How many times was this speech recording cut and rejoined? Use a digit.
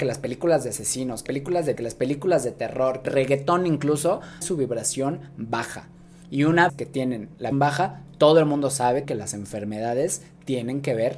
7